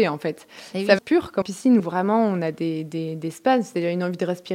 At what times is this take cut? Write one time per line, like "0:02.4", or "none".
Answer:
0:01.0
0:01.4
0:01.8